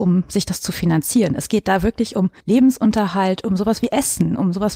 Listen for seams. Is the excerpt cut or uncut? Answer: cut